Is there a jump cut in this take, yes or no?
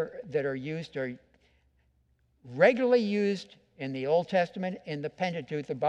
no